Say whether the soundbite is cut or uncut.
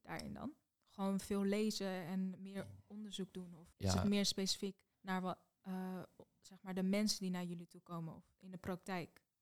cut